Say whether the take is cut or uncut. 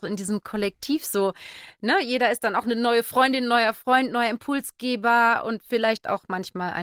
uncut